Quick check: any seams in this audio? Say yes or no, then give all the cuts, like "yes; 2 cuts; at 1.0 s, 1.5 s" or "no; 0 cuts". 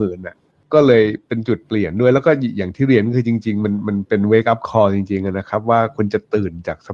no; 0 cuts